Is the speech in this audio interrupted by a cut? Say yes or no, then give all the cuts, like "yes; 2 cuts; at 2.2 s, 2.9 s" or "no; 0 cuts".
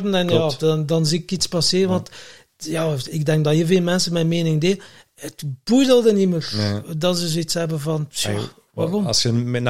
no; 0 cuts